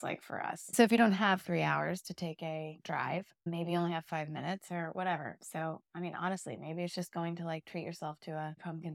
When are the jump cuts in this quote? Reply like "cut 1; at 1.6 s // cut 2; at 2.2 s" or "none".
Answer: cut 1; at 3.4 s